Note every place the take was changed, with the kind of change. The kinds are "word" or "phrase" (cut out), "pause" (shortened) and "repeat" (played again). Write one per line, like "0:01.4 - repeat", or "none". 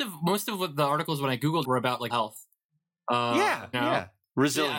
0:01.6 - word
0:02.1 - word
0:03.7 - word